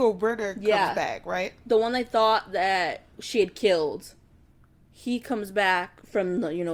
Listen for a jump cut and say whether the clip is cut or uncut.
uncut